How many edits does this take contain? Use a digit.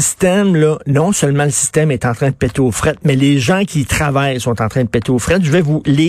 0